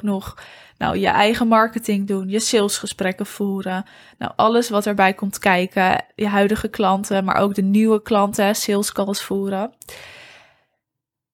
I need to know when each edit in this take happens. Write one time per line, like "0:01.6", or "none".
none